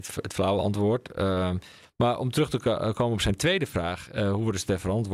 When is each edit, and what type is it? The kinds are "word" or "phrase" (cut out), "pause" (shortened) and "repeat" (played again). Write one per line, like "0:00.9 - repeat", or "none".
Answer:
none